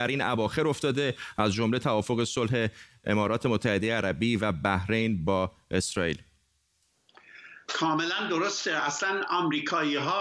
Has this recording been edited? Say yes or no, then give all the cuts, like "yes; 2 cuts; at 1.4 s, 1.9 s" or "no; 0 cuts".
no; 0 cuts